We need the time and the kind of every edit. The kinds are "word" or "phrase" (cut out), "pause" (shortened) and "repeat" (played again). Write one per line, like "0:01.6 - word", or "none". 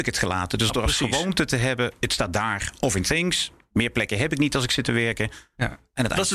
none